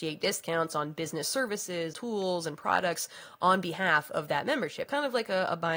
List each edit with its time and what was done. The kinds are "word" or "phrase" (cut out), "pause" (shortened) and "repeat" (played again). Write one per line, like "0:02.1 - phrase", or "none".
0:01.9 - word
0:04.9 - word